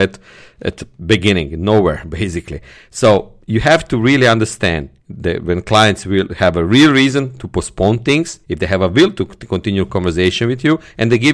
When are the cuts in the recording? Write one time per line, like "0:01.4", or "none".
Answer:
0:03.4
0:05.0
0:08.4